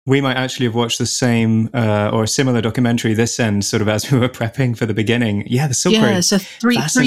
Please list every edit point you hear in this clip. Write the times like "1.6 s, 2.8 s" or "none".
none